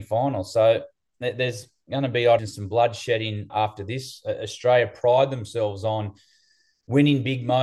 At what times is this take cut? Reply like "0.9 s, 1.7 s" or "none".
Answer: 2.4 s, 3.5 s